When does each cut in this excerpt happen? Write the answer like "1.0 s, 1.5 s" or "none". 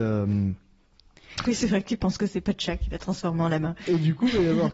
none